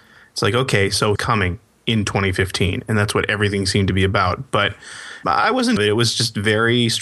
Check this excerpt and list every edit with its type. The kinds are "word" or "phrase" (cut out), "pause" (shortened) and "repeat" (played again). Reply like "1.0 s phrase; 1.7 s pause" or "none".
1.1 s phrase; 5.2 s word; 5.8 s phrase